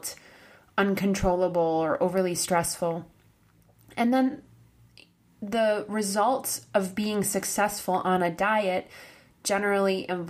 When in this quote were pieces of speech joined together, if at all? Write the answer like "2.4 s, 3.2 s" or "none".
none